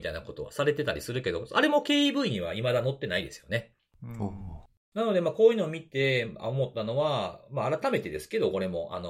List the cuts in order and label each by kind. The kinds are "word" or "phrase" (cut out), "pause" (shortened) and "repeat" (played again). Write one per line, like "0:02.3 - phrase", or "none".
none